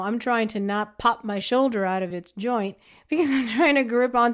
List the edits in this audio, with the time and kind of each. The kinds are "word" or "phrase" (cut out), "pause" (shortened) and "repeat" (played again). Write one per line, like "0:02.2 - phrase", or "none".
none